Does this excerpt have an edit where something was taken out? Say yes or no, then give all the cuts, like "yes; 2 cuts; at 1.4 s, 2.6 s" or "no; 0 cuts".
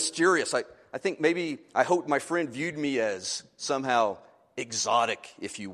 no; 0 cuts